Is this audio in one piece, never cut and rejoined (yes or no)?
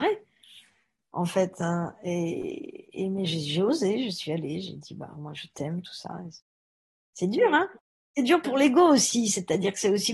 yes